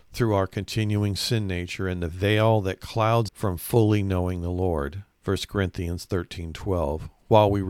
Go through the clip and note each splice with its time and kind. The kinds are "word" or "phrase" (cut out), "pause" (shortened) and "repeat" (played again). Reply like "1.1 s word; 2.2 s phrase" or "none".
3.3 s word; 5.1 s pause